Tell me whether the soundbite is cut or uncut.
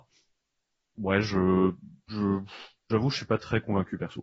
uncut